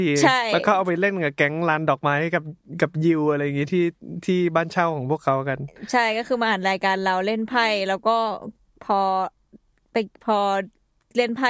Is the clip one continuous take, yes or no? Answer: yes